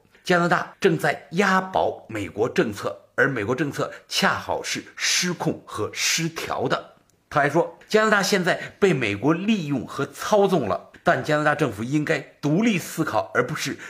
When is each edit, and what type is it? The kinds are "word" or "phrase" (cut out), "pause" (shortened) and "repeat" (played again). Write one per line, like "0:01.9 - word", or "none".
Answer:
none